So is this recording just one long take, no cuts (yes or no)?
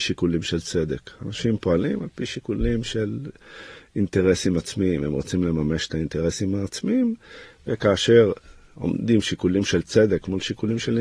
yes